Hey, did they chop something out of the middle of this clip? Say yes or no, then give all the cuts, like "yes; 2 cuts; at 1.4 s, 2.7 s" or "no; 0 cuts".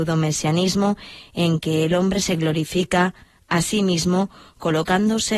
no; 0 cuts